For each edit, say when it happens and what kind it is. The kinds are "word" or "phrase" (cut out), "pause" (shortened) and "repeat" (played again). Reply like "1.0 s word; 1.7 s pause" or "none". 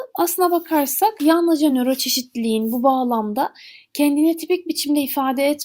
none